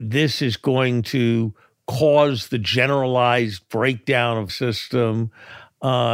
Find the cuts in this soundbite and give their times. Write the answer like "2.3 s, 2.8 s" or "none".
4.5 s